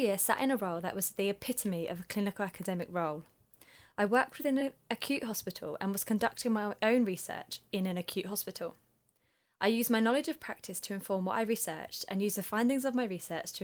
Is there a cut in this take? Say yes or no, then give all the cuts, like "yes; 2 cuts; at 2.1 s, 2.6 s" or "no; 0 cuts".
no; 0 cuts